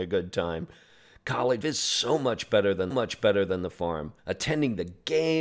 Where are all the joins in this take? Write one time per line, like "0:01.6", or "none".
0:01.6
0:02.9
0:04.2